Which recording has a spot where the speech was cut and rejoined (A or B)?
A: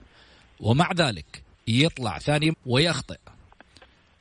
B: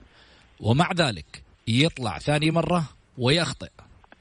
A